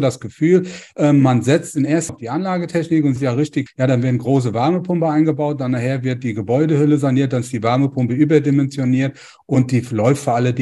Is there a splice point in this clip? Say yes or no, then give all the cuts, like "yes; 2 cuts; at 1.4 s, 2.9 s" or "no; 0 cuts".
yes; 3 cuts; at 2.1 s, 3.2 s, 3.7 s